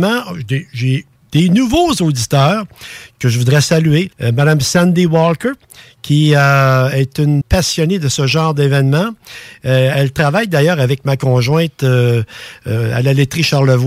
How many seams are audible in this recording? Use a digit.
2